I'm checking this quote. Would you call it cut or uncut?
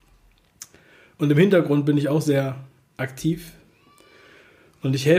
uncut